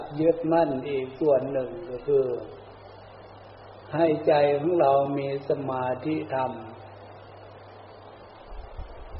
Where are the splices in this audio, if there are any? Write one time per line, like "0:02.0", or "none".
0:03.8